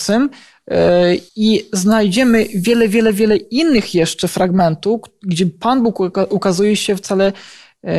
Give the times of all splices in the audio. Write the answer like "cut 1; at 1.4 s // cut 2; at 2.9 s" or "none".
cut 1; at 1.3 s